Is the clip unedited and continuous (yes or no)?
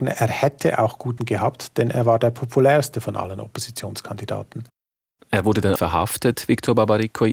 no